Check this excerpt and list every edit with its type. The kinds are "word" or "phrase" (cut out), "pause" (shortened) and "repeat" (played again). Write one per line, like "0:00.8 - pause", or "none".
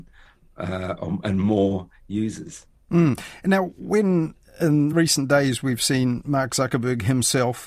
none